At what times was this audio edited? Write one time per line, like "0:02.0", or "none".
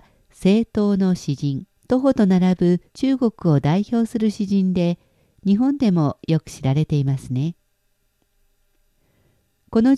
0:01.8
0:02.9